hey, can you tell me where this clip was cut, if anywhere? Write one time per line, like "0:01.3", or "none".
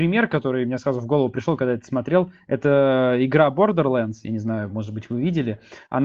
none